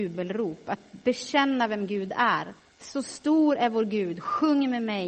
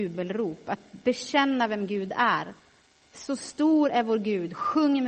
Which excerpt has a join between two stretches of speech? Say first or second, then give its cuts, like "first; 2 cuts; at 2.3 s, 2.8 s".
first; 1 cut; at 2.7 s